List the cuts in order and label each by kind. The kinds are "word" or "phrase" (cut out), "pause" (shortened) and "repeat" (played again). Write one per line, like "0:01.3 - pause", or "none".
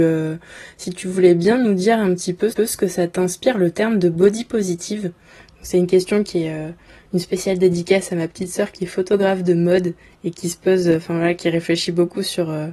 0:02.5 - repeat